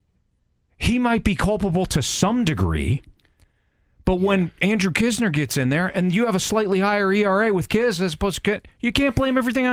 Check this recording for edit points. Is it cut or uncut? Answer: uncut